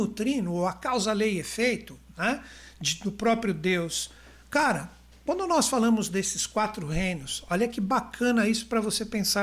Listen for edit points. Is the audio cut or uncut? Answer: uncut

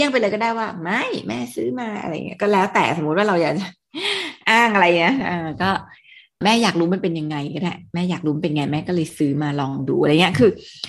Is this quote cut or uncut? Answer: uncut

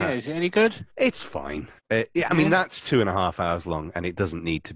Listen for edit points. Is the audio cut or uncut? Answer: cut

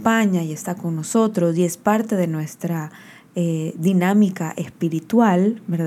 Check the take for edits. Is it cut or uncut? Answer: uncut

